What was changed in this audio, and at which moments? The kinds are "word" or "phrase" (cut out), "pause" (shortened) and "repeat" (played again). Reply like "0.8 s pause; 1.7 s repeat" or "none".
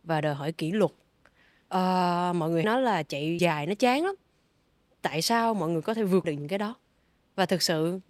2.6 s word; 3.4 s word; 6.2 s word

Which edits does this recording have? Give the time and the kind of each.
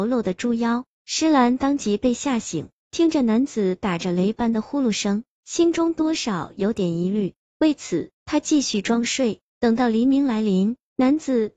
8.1 s pause

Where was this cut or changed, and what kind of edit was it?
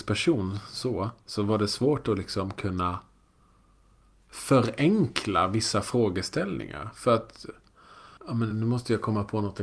8.2 s pause; 8.5 s word

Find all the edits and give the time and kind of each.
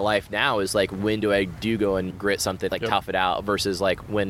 2.1 s word; 2.7 s word

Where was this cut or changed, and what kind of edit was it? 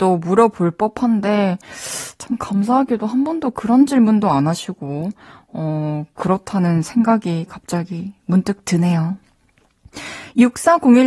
none

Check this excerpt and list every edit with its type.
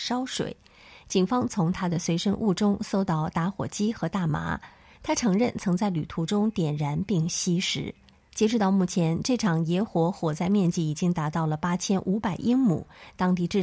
8.1 s pause

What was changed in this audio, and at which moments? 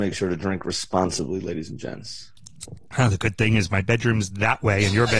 none

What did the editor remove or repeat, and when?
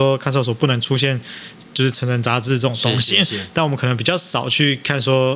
none

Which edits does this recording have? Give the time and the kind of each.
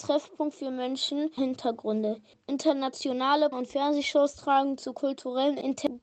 1.4 s word; 3.5 s word

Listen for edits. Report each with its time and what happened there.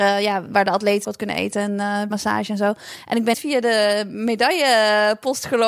1.0 s phrase; 2.1 s word; 3.3 s word

